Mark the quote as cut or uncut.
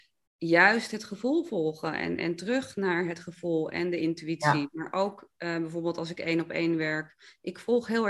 uncut